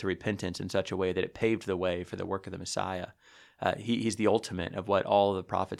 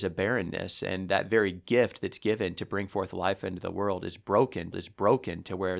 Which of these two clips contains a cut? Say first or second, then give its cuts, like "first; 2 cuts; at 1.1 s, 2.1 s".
second; 1 cut; at 4.7 s